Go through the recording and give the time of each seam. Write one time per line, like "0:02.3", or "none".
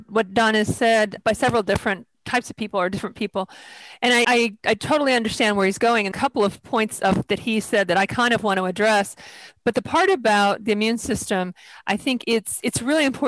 0:02.1
0:04.2
0:06.1